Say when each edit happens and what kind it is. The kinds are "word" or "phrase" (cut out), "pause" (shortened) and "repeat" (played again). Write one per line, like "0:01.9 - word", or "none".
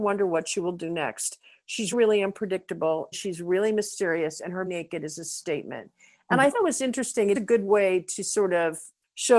0:01.9 - word
0:03.1 - word
0:04.7 - word
0:06.5 - word
0:07.3 - word

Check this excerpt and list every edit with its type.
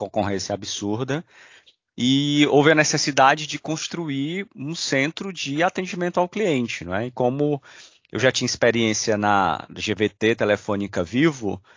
none

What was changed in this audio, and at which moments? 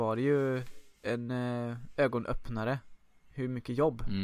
0:00.9 - pause

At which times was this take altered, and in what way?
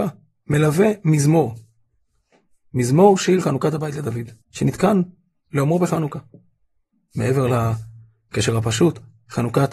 0:04.4 - pause

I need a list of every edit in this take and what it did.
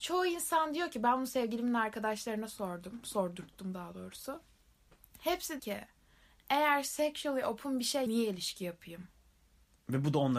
0:05.6 - word
0:08.1 - word

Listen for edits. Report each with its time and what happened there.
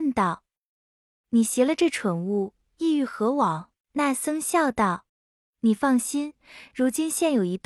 0:03.8 - pause
0:05.1 - pause

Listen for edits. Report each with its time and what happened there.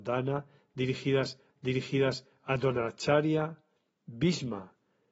0:01.5 - repeat
0:03.8 - pause

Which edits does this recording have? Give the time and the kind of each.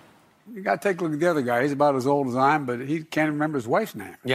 none

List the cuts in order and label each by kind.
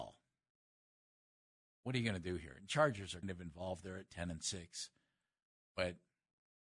0:03.2 - word

